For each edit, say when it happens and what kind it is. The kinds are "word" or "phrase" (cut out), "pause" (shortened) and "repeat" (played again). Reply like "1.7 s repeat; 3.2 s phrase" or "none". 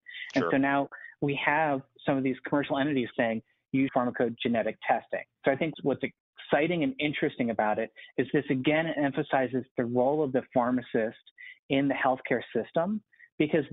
3.1 s phrase; 3.9 s phrase; 5.3 s pause; 5.7 s word